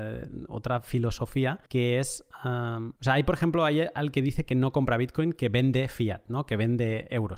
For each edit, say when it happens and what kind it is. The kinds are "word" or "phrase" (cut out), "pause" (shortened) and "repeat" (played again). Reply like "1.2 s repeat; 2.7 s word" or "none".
1.7 s pause; 3.0 s pause